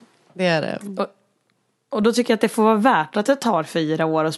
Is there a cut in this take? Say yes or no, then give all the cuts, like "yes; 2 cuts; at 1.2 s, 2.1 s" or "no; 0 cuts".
no; 0 cuts